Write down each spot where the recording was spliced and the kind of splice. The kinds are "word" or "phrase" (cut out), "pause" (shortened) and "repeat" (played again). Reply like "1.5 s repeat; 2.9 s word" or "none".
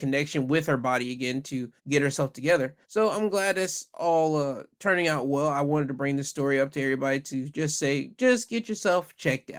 1.8 s pause; 2.8 s pause